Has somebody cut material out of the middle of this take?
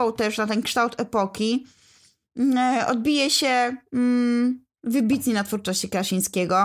no; 0 cuts

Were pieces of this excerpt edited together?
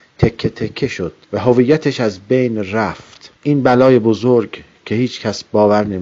yes; 2 cuts; at 1.2 s, 3.4 s

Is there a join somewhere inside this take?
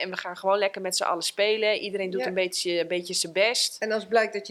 no; 0 cuts

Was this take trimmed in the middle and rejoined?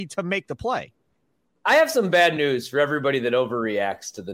no; 0 cuts

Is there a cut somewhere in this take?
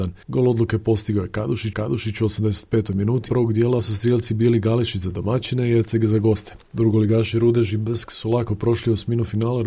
yes; 2 cuts; at 1.7 s, 3.3 s

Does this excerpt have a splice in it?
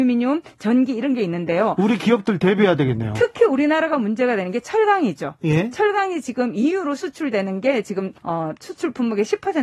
yes; 1 cut; at 8.2 s

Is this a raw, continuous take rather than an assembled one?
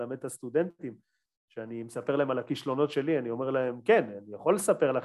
yes; 0 cuts

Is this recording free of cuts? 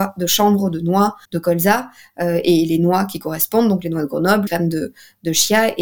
no; 2 cuts; at 1.2 s, 4.5 s

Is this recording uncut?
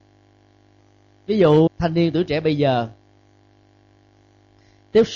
no; 1 cut; at 1.7 s

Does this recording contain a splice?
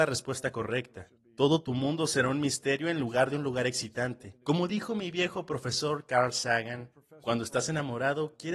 yes; 2 cuts; at 1.2 s, 4.4 s

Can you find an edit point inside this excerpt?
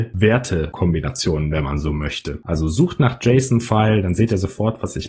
no; 0 cuts

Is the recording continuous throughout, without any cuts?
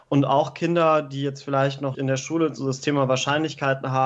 no; 1 cut; at 1.9 s

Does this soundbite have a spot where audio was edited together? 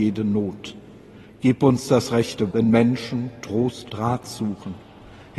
yes; 2 cuts; at 2.5 s, 3.9 s

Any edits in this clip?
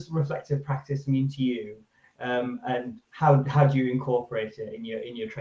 no; 0 cuts

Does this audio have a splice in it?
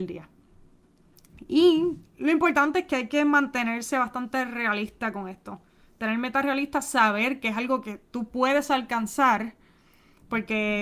no; 0 cuts

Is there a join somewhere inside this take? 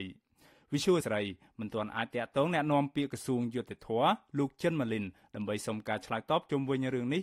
yes; 1 cut; at 1.0 s

